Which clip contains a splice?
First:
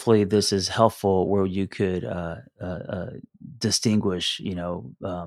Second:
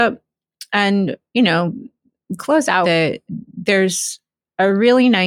second; 3 cuts; at 2.4 s, 2.8 s, 3.3 s

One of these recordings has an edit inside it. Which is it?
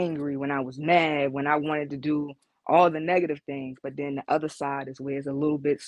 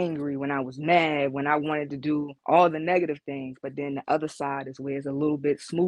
second; 1 cut; at 2.4 s

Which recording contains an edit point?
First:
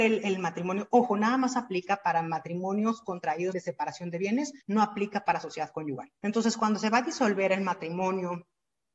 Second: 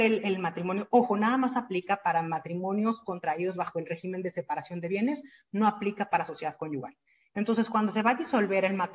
first; 3 cuts; at 3.5 s, 4.6 s, 6.2 s

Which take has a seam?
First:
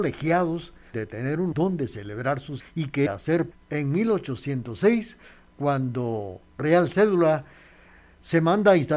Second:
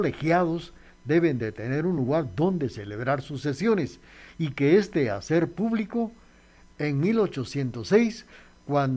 first; 6 cuts; at 0.9 s, 1.5 s, 2.6 s, 3.1 s, 3.5 s, 6.6 s

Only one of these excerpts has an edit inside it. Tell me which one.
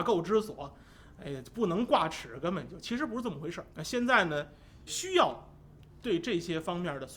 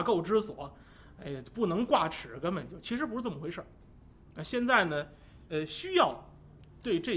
first; 2 cuts; at 3.7 s, 4.9 s

